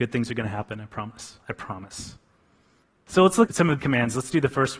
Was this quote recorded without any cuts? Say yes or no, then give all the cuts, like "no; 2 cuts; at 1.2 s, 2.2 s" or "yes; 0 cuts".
no; 3 cuts; at 2.8 s, 3.5 s, 3.8 s